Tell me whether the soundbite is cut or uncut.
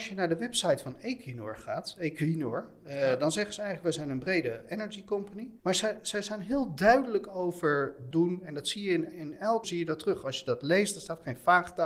cut